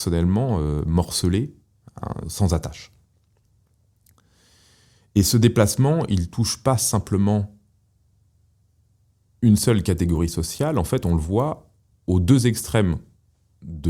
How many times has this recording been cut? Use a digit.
1